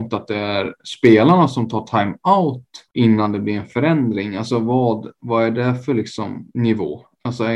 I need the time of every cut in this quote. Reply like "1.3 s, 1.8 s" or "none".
2.9 s, 6.5 s